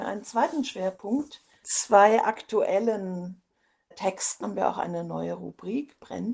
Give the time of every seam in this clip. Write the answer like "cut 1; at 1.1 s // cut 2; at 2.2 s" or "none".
cut 1; at 1.6 s // cut 2; at 3.9 s // cut 3; at 4.4 s